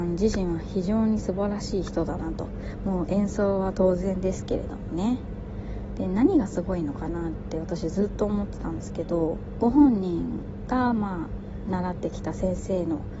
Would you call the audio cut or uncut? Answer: cut